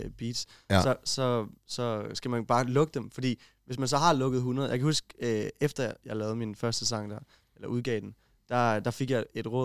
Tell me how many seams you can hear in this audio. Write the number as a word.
zero